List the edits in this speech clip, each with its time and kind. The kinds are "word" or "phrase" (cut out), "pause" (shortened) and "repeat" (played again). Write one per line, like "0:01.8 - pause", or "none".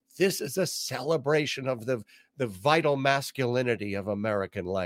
none